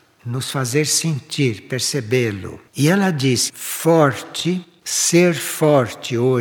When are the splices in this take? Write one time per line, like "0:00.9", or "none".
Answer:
0:02.7
0:03.5